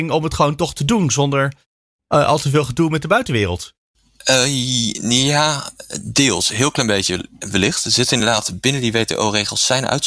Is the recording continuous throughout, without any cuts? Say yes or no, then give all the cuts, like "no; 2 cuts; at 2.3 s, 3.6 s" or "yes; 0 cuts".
yes; 0 cuts